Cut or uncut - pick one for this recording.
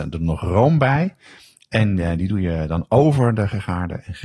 uncut